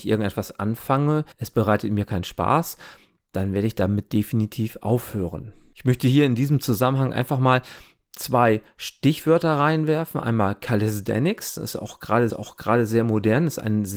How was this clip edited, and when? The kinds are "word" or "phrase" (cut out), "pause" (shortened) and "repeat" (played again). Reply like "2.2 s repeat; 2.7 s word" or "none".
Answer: 1.3 s pause; 12.3 s repeat